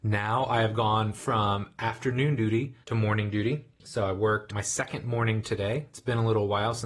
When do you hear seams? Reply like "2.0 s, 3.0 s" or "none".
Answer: 2.8 s, 4.5 s